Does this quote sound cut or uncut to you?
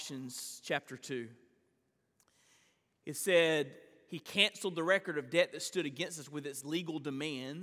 uncut